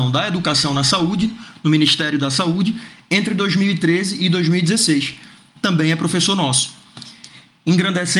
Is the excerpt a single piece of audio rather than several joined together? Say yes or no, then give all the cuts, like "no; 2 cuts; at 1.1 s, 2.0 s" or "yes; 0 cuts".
yes; 0 cuts